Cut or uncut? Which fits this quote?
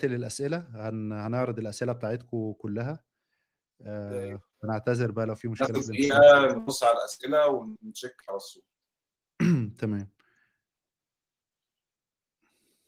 uncut